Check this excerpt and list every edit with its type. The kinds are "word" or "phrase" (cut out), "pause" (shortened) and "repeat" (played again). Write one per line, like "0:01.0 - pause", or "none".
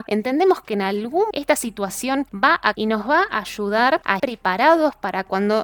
0:01.3 - word
0:02.7 - word
0:04.2 - word